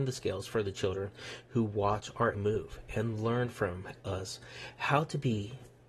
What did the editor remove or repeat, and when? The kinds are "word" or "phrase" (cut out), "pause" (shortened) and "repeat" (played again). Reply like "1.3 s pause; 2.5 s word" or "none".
2.3 s word

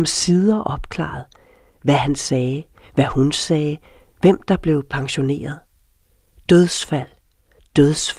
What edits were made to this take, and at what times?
none

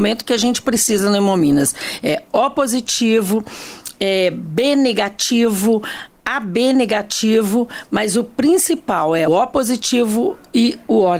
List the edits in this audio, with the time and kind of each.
9.3 s word

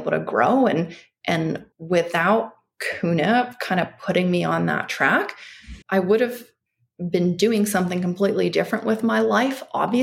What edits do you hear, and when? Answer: 1.7 s pause; 5.8 s pause

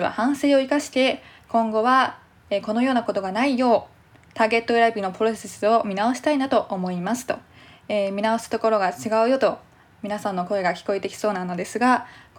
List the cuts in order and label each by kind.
none

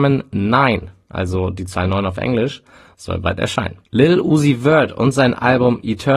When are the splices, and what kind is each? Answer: 3.8 s pause

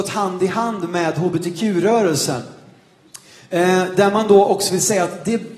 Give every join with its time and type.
none

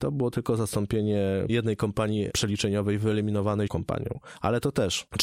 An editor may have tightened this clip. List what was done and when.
1.5 s word; 3.7 s word

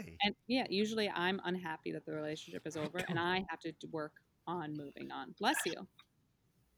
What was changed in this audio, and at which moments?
none

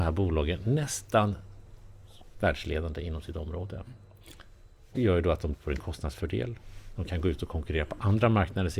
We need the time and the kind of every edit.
2.3 s word; 4.9 s word; 5.5 s word

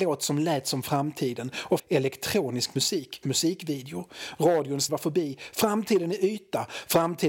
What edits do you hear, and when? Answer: 1.8 s phrase; 3.2 s word; 4.9 s word

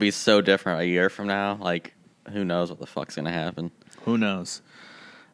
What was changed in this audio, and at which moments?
none

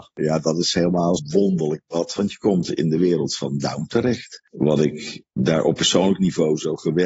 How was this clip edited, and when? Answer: 1.2 s word

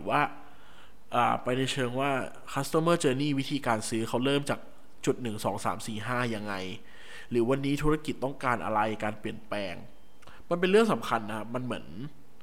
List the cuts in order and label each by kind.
none

